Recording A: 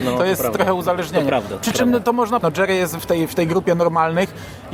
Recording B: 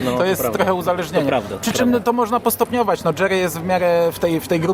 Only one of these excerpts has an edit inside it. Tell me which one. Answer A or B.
A